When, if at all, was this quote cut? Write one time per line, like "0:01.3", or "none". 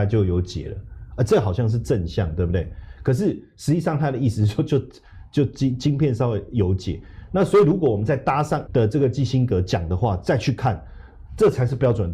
0:08.7